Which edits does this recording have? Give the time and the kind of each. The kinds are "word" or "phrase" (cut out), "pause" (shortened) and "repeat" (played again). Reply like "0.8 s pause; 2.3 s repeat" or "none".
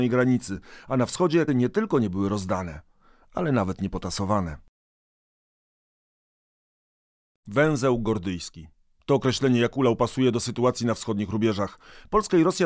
1.5 s word